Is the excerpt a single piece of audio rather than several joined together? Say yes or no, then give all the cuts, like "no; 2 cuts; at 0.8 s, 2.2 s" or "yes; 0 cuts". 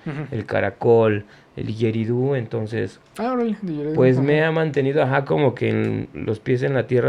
yes; 0 cuts